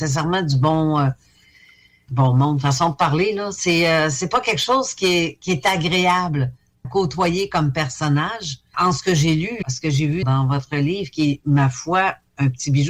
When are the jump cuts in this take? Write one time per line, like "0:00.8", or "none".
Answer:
0:02.1
0:06.8
0:08.7
0:09.6
0:10.2